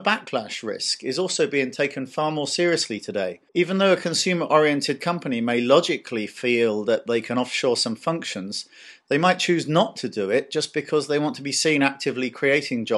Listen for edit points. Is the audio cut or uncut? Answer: cut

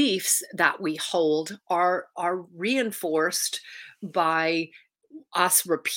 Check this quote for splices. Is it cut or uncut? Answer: uncut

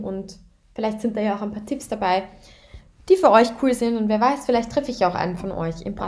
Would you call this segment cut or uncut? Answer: uncut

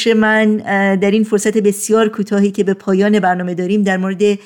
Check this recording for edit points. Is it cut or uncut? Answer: uncut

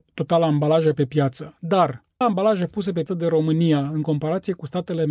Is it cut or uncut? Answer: cut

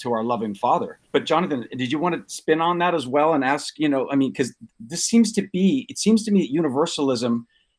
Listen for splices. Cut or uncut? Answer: cut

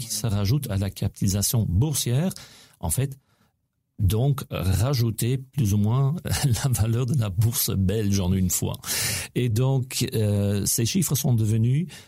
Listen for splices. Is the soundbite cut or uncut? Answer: uncut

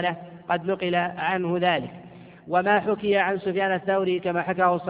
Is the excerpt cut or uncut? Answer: uncut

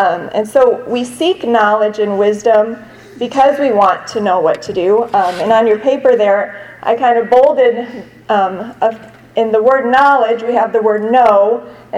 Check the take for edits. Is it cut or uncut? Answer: uncut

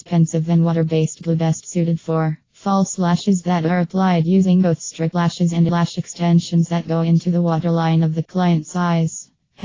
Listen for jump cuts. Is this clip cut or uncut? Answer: cut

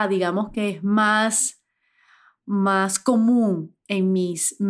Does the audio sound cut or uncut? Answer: uncut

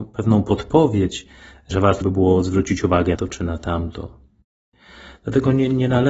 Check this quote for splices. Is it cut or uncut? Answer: cut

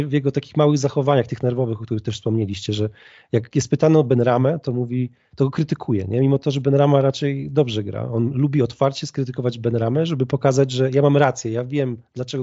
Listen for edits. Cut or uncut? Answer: uncut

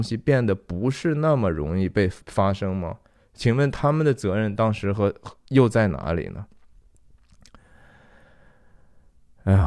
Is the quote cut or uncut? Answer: cut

